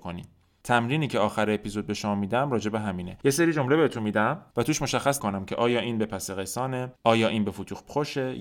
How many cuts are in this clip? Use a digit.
1